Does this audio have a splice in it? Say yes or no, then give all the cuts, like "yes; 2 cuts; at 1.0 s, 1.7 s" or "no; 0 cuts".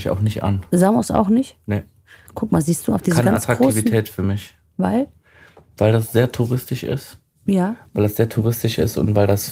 no; 0 cuts